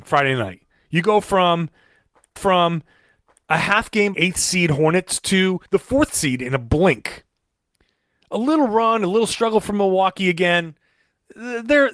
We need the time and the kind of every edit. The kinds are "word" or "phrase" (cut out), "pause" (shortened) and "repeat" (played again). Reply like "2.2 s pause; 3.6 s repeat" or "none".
2.4 s repeat; 4.1 s phrase; 5.7 s pause

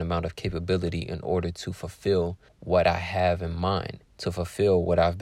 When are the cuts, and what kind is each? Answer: 2.5 s pause; 4.1 s pause

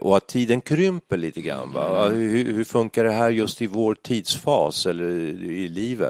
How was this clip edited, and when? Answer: none

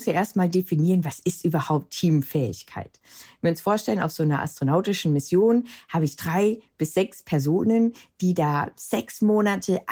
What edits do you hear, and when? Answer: none

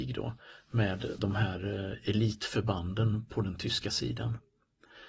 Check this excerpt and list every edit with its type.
1.2 s word

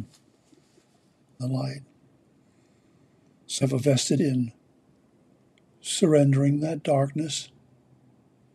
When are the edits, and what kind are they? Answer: 1.4 s word; 3.6 s word; 4.2 s word

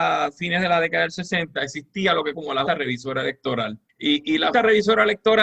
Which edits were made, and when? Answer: 2.3 s word; 2.7 s word; 3.9 s pause; 4.5 s word

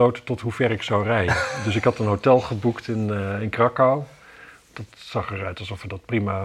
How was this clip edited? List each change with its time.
none

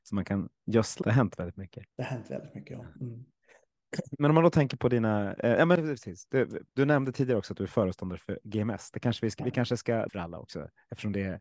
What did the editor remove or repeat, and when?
1.0 s phrase; 1.9 s pause; 6.7 s pause; 10.1 s phrase

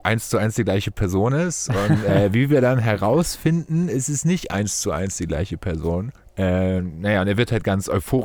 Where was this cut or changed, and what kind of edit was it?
6.2 s pause

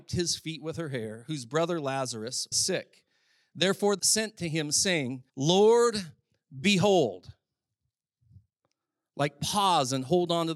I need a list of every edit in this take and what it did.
2.5 s word; 4.0 s word; 5.3 s pause

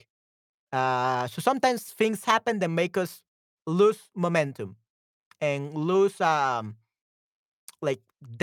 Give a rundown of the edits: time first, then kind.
none

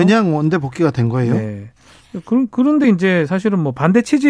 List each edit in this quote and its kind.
none

